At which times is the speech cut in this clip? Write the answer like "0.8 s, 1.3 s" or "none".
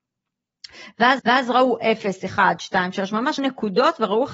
1.2 s, 3.4 s